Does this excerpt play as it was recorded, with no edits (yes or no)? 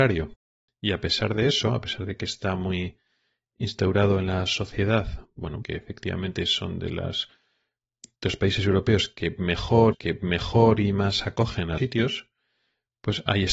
no